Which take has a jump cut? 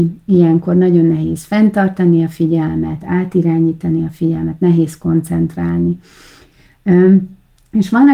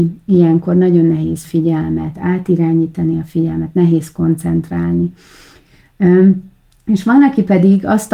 second; 1 cut; at 1.4 s

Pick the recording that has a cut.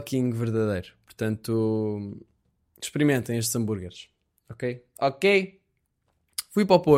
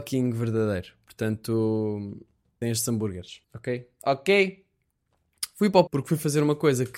second; 3 cuts; at 2.6 s, 3.4 s, 5.9 s

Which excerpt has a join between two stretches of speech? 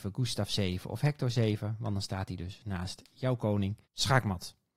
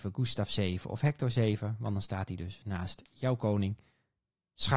first; 1 cut; at 3.8 s

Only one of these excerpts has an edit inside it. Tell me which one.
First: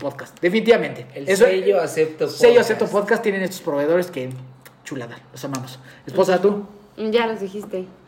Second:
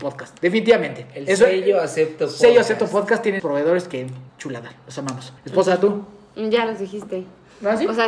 second; 3 cuts; at 3.4 s, 4.3 s, 5.4 s

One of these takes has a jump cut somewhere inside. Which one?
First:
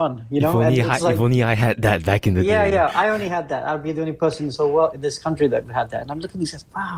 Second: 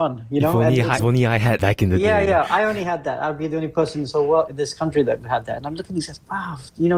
second; 2 cuts; at 1.0 s, 1.6 s

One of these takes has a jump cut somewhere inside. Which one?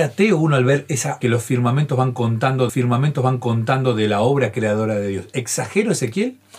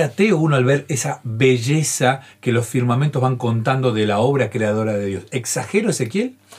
first; 2 cuts; at 1.2 s, 2.7 s

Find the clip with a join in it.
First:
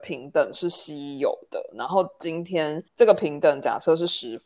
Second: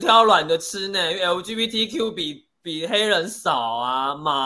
first; 1 cut; at 2.9 s

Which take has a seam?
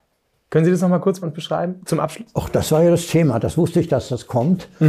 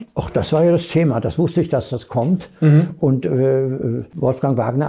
first; 1 cut; at 1.2 s

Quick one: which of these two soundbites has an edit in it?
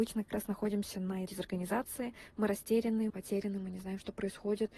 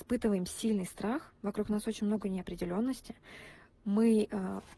first; 2 cuts; at 1.3 s, 3.1 s

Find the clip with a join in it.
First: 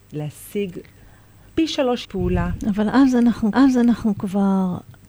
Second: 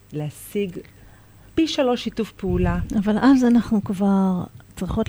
first; 2 cuts; at 2.0 s, 3.5 s

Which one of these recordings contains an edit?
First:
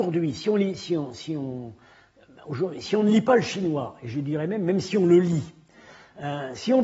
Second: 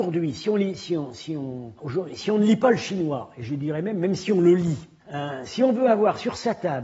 second; 2 cuts; at 1.8 s, 5.0 s

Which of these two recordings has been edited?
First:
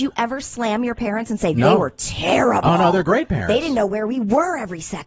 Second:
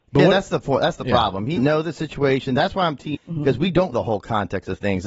second; 3 cuts; at 1.6 s, 3.1 s, 3.9 s

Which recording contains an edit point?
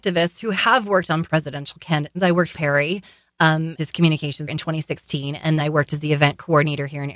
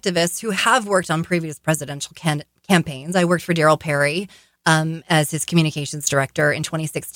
first; 6 cuts; at 1.2 s, 2.1 s, 2.5 s, 3.8 s, 4.5 s, 5.6 s

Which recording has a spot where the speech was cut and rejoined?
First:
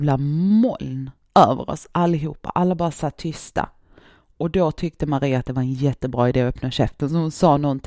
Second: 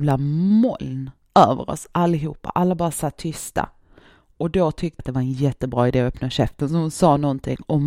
second; 1 cut; at 5.0 s

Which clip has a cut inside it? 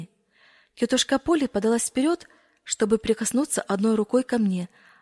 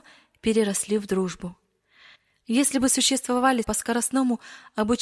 second; 1 cut; at 3.6 s

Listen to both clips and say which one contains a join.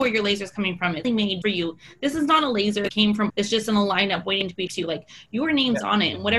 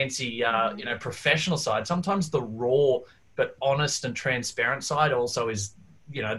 first; 5 cuts; at 1.0 s, 1.4 s, 2.9 s, 3.3 s, 4.7 s

